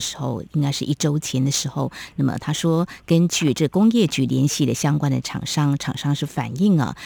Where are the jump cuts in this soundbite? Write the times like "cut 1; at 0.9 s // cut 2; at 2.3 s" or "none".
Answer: none